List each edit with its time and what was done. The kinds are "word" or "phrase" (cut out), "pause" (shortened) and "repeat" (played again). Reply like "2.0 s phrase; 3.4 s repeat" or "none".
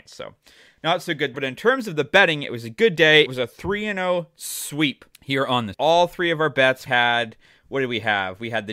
1.3 s word; 3.3 s word; 5.1 s pause; 5.7 s phrase; 6.9 s word